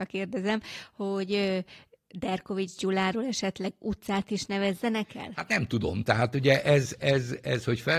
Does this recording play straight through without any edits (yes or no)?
yes